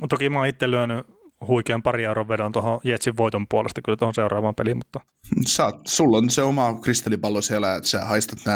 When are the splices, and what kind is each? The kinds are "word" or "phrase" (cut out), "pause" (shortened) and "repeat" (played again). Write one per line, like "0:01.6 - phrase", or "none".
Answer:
none